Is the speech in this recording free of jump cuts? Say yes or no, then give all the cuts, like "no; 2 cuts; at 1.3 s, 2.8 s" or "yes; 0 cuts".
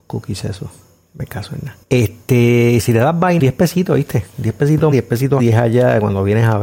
no; 4 cuts; at 1.8 s, 3.4 s, 4.9 s, 5.4 s